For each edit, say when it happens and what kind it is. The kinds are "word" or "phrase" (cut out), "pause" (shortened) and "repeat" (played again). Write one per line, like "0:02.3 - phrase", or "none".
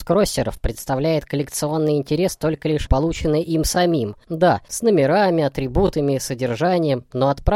0:02.9 - word